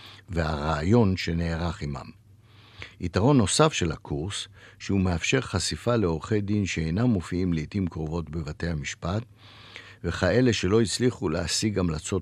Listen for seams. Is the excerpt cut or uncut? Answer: uncut